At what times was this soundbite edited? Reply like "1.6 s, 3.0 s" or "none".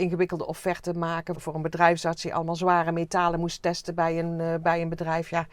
1.3 s